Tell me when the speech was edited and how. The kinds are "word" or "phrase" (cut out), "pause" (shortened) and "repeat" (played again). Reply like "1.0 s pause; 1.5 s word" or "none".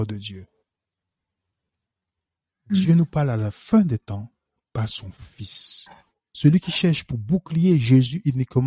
none